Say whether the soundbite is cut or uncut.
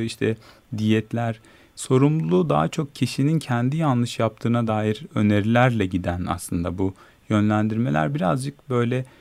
uncut